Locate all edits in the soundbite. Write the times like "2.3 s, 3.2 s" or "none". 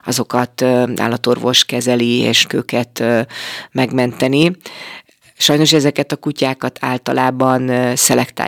2.5 s